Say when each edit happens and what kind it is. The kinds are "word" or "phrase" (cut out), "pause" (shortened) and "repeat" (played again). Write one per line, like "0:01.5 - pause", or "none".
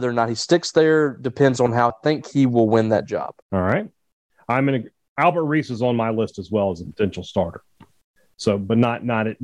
0:01.9 - phrase
0:03.4 - pause